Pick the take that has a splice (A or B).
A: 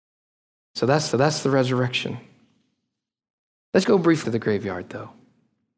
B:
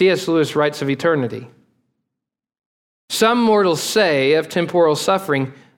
A